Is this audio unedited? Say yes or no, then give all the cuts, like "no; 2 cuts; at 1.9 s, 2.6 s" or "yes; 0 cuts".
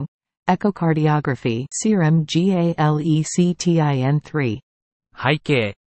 no; 1 cut; at 1.7 s